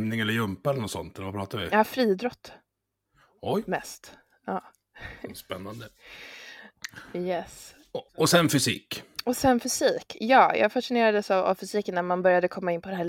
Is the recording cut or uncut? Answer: cut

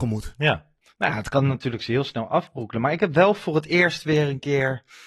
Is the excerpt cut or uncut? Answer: uncut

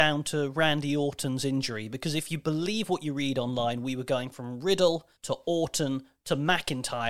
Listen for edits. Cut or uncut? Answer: cut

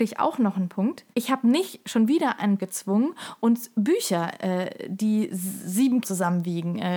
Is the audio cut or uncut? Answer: cut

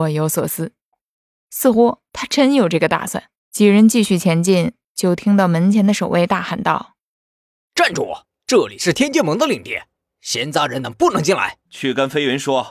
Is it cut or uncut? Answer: cut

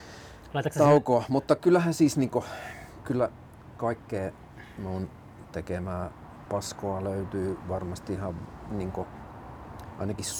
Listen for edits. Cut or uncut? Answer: uncut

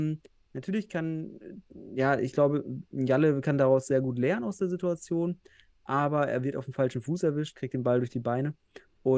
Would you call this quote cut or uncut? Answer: uncut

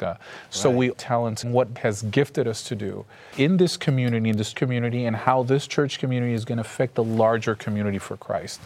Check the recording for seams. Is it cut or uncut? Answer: cut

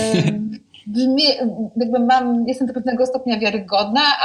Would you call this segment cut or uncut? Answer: uncut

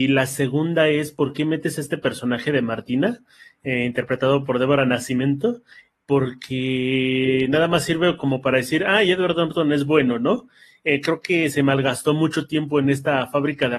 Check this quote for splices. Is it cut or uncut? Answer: uncut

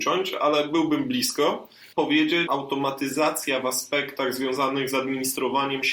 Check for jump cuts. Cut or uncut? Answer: cut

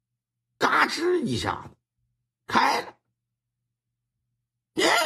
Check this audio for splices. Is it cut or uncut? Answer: uncut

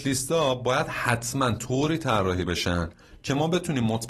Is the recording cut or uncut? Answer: uncut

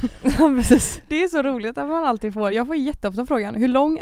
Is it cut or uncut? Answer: uncut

